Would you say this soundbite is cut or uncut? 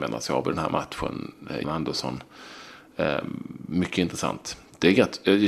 cut